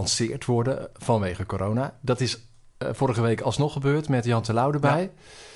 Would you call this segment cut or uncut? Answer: uncut